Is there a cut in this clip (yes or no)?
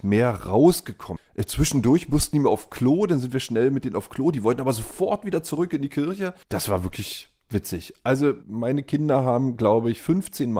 yes